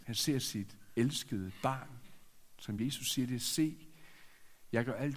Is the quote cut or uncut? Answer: uncut